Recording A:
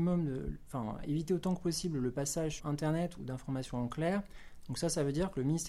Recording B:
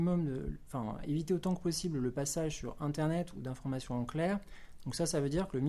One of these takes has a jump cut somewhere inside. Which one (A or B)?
A